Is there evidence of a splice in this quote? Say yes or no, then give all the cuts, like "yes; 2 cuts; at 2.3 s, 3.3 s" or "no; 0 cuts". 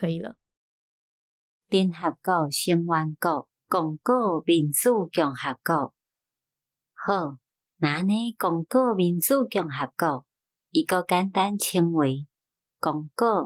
yes; 1 cut; at 3.5 s